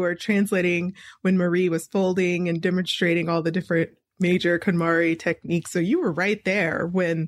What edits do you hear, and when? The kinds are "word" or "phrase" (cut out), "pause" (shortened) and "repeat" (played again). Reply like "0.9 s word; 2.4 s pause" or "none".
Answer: none